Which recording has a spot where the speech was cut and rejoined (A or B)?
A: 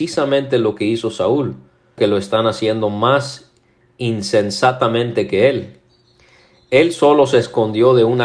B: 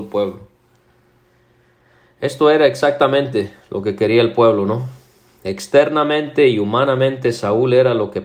A